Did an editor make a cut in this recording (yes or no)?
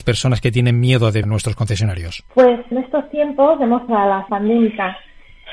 yes